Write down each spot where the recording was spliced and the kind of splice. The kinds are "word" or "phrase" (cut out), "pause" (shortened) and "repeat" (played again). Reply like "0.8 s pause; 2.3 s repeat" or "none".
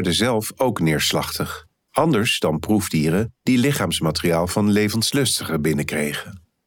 1.8 s pause